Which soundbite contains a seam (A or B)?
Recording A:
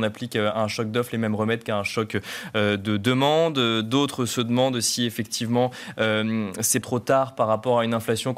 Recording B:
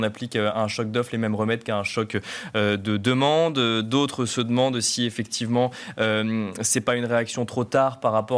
A